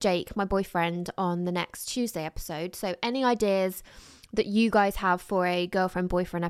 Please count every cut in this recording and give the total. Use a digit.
0